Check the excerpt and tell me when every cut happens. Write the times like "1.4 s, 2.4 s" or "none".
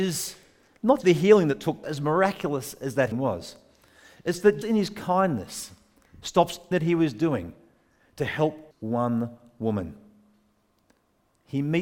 1.0 s, 1.8 s, 3.1 s, 4.6 s, 6.7 s, 8.7 s